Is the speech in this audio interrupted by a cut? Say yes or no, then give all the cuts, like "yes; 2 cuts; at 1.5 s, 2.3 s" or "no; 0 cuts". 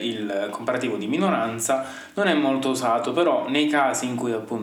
no; 0 cuts